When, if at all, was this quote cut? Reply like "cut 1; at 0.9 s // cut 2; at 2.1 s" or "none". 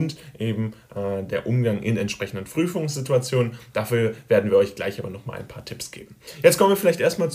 none